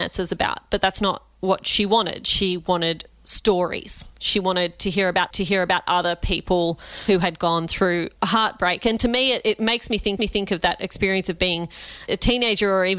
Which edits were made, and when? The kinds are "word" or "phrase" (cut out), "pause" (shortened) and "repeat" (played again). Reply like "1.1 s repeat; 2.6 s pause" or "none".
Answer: 5.3 s repeat; 8.2 s pause; 10.2 s repeat